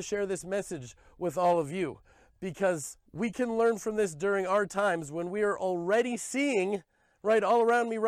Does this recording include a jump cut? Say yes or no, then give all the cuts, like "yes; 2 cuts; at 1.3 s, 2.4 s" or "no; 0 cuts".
yes; 1 cut; at 3.1 s